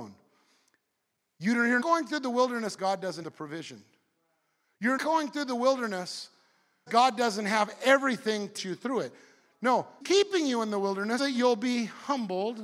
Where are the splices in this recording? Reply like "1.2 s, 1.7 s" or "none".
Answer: 1.8 s, 2.8 s, 3.2 s, 5.0 s, 6.9 s, 8.6 s, 10.0 s, 11.2 s